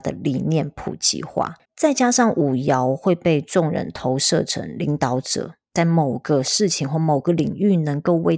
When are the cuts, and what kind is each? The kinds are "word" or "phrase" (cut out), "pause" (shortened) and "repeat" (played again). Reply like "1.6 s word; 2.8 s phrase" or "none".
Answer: 1.6 s pause